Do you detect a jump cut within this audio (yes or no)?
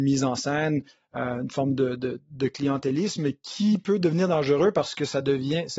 no